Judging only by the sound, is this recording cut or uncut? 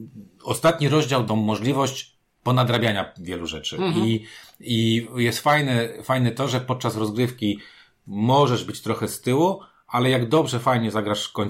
cut